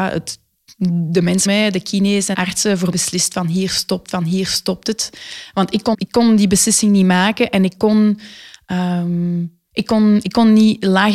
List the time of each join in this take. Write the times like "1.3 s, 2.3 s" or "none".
1.5 s, 2.3 s, 2.9 s, 4.1 s, 5.9 s, 9.7 s